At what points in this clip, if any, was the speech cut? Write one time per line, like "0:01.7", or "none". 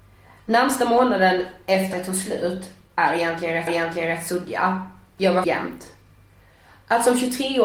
0:01.9
0:03.7
0:05.4